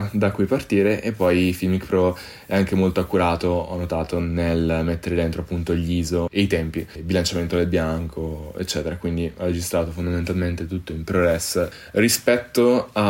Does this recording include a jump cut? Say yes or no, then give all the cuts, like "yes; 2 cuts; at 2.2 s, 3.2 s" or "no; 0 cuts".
no; 0 cuts